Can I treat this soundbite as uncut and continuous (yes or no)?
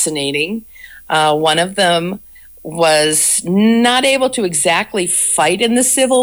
yes